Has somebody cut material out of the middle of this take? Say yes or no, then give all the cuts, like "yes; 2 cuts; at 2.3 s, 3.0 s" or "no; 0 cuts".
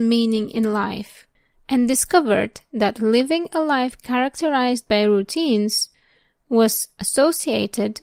no; 0 cuts